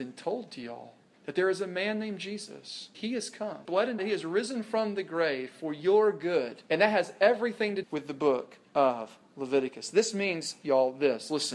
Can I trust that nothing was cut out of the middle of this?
no; 6 cuts; at 1.0 s, 2.9 s, 3.6 s, 4.0 s, 6.7 s, 7.8 s

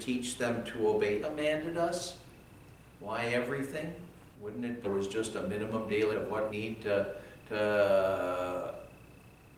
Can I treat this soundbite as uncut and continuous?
no; 5 cuts; at 1.2 s, 4.3 s, 4.8 s, 6.1 s, 6.5 s

